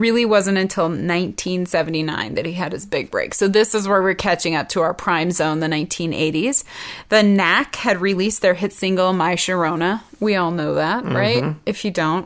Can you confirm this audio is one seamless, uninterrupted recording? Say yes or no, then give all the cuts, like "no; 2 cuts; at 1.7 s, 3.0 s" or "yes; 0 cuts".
yes; 0 cuts